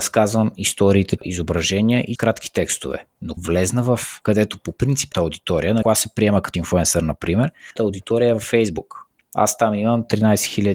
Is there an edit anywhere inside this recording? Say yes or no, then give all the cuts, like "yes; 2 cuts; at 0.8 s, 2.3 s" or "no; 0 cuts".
yes; 8 cuts; at 1.2 s, 2.2 s, 3.4 s, 4.2 s, 5.1 s, 5.8 s, 6.5 s, 7.8 s